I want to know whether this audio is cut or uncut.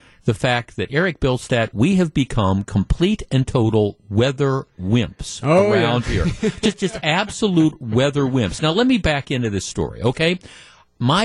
uncut